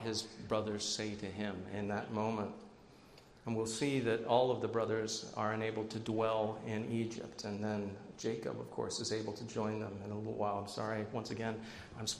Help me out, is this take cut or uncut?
uncut